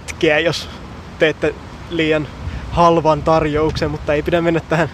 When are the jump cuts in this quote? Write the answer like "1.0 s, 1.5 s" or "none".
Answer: none

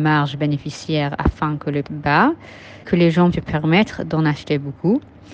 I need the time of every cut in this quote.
1.8 s, 2.8 s, 3.3 s

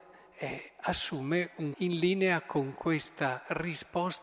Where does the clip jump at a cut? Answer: 1.7 s

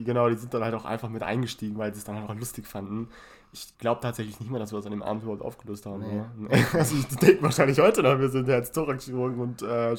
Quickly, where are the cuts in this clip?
2.3 s, 3.7 s

